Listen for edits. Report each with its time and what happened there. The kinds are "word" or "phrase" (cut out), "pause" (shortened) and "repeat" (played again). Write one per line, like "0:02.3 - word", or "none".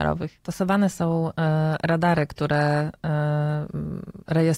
none

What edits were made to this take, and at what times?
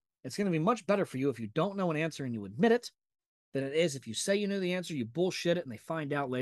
none

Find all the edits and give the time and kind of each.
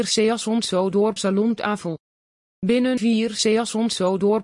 0:01.2 - word
0:03.0 - word

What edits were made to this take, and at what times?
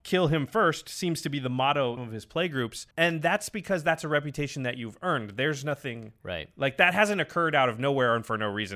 0:02.0 - phrase
0:02.9 - pause

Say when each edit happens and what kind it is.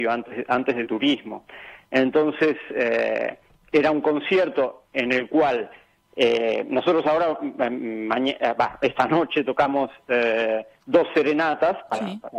none

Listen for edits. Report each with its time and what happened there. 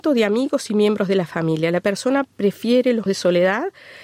0:03.1 - word

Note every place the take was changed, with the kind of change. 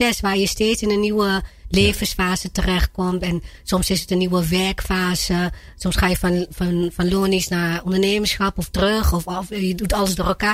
none

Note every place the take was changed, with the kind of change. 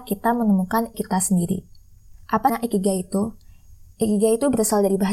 0:00.9 - word
0:02.5 - word

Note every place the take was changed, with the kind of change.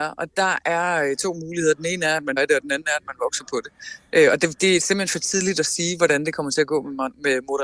0:02.4 - word

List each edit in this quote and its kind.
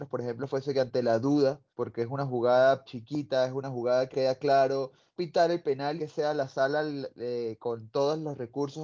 0:01.7 - pause
0:02.8 - word
0:04.1 - word
0:05.2 - word
0:06.0 - phrase

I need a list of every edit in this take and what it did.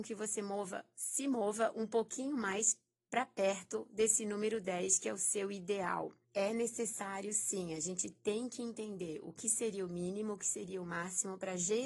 0:06.2 - pause

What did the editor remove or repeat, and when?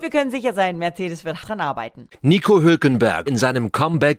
0:01.4 - word
0:03.3 - word

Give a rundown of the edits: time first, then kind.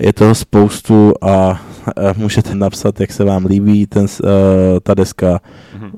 0:02.5 - word

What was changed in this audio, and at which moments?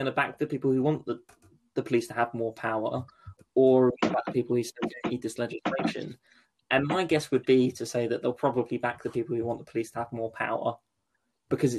none

